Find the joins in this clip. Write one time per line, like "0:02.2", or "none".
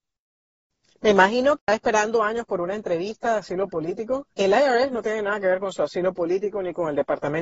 0:01.6
0:04.3